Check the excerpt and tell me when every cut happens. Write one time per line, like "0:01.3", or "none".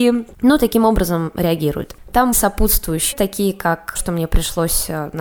0:02.3
0:03.1
0:04.0